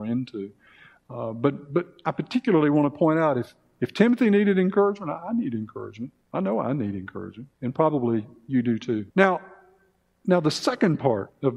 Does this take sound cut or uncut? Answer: cut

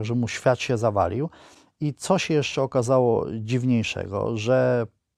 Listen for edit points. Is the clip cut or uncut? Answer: uncut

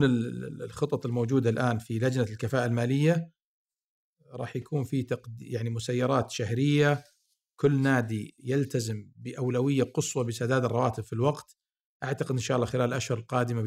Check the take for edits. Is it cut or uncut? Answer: uncut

